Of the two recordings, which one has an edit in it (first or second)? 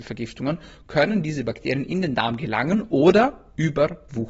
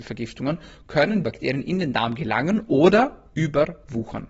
second